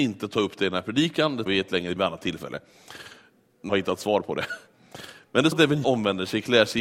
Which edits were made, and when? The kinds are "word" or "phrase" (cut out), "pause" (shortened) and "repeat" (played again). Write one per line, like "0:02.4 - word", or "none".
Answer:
0:01.5 - word
0:02.0 - word
0:03.7 - word
0:05.5 - word
0:05.8 - word